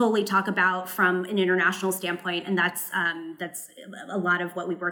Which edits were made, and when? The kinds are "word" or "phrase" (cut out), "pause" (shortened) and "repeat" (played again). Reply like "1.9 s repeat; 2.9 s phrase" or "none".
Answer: none

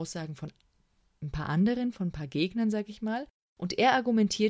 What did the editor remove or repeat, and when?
none

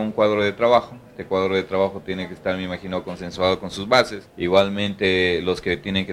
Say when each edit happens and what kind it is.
4.3 s pause

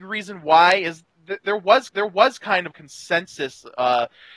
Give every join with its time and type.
1.9 s repeat; 2.7 s phrase

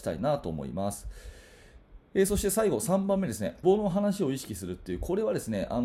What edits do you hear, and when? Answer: 3.6 s phrase

